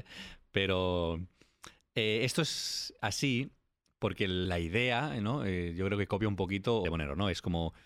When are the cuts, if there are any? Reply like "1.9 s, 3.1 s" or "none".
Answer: none